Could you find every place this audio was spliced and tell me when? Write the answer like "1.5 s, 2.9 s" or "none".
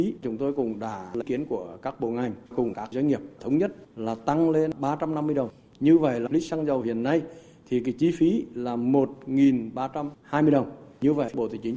1.2 s, 2.5 s, 6.3 s